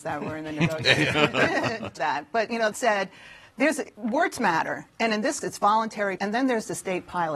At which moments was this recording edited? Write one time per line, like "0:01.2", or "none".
0:02.0
0:02.7
0:05.4
0:06.2